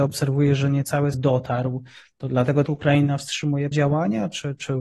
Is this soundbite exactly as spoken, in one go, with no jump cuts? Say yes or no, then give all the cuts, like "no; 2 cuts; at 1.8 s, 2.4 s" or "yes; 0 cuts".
no; 3 cuts; at 1.1 s, 2.7 s, 3.7 s